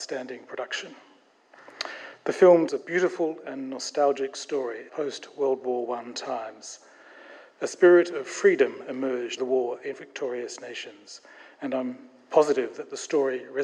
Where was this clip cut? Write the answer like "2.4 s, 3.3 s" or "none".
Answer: 2.7 s, 4.9 s, 9.4 s, 9.9 s